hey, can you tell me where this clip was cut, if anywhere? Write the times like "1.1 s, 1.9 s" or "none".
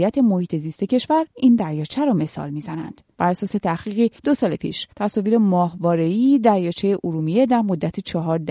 1.3 s, 4.2 s, 4.9 s